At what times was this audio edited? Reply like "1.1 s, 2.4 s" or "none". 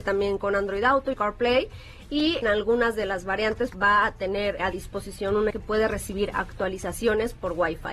1.1 s, 2.4 s, 3.7 s, 4.6 s, 5.5 s